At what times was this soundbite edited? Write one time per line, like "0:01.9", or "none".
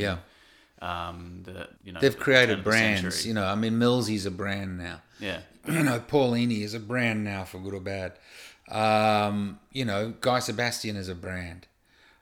0:01.8